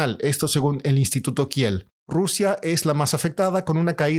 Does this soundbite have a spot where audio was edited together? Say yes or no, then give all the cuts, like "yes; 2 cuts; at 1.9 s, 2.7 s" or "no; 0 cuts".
no; 0 cuts